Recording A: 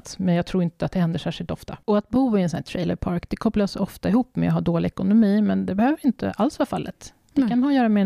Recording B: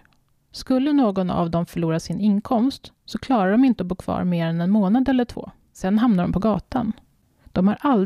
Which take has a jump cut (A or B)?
A